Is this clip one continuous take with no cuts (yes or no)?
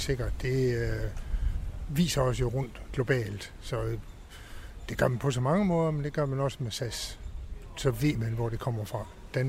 yes